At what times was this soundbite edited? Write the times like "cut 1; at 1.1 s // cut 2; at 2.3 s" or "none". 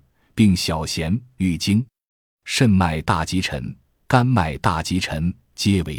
none